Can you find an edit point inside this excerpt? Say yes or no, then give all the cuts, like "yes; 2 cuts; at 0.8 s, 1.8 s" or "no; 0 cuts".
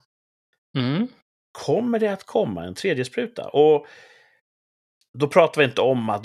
no; 0 cuts